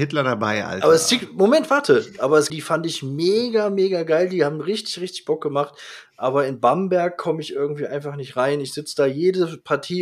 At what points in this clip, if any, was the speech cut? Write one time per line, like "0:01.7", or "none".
0:02.5